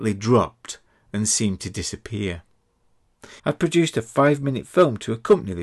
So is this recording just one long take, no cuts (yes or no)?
no